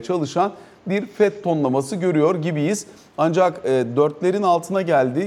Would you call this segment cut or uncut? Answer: uncut